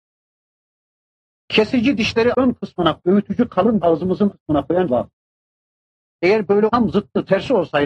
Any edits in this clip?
yes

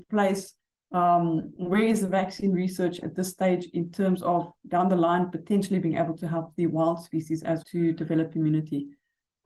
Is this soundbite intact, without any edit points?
no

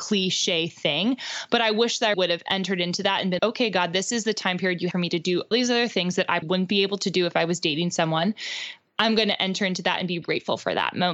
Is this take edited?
yes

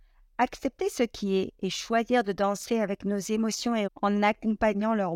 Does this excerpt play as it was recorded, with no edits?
no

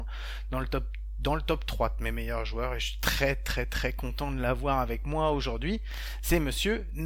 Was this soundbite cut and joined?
no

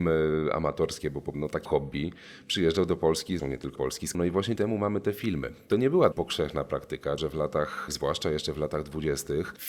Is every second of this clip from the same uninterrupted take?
no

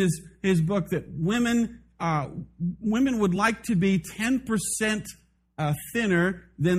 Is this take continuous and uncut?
yes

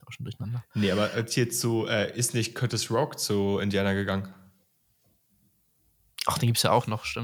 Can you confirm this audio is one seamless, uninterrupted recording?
yes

